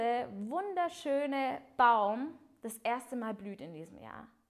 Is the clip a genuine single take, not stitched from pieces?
yes; 0 cuts

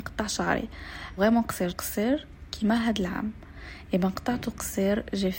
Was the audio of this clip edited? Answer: yes; 2 cuts; at 1.2 s, 1.7 s

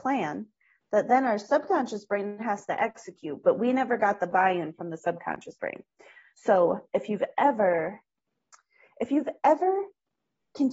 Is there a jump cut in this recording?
no; 0 cuts

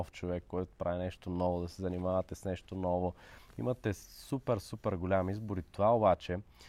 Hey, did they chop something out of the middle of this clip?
no; 0 cuts

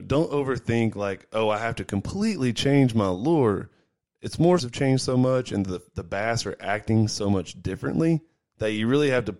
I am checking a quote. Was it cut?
yes; 1 cut; at 4.6 s

